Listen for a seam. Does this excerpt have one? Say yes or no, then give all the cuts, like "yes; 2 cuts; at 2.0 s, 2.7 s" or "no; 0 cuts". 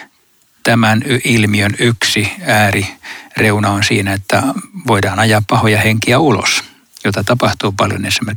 no; 0 cuts